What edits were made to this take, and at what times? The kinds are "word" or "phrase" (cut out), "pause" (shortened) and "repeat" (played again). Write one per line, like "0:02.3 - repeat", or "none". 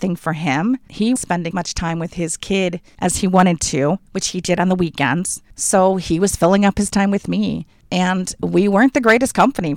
0:01.2 - word
0:01.5 - word